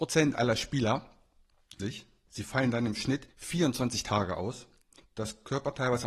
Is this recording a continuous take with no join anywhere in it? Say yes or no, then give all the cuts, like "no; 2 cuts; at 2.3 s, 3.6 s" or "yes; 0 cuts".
no; 3 cuts; at 1.8 s, 3.3 s, 4.8 s